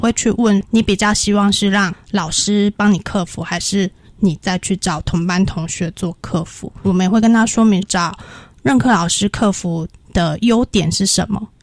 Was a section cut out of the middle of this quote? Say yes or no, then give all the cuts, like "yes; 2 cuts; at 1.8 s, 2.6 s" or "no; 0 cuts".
no; 0 cuts